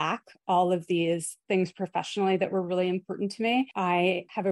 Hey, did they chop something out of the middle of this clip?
no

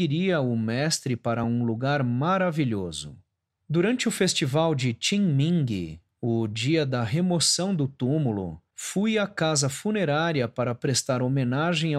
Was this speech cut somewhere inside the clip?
no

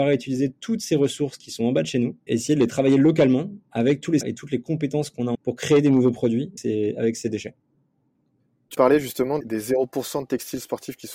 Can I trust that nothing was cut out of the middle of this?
no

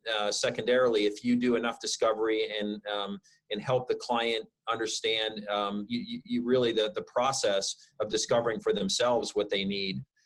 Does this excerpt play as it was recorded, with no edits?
yes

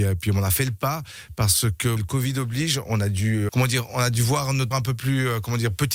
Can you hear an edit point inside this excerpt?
yes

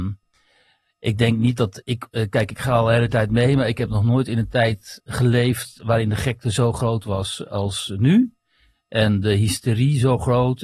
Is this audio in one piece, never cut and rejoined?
yes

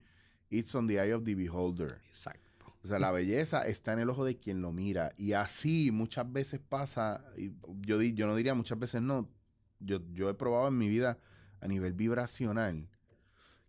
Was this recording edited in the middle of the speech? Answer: no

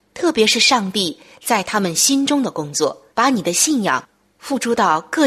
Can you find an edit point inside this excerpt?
yes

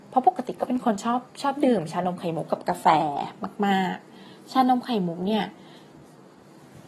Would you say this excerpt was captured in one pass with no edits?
no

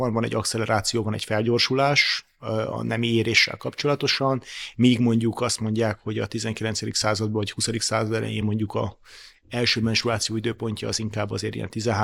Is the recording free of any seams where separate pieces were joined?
yes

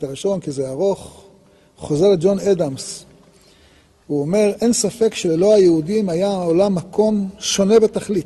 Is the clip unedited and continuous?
yes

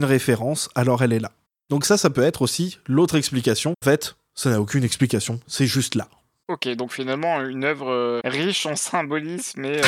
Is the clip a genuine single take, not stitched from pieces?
no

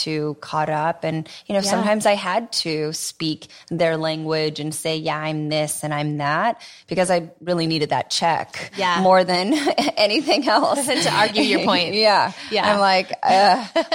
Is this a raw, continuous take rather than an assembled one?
yes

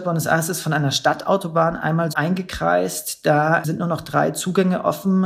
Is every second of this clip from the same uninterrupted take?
no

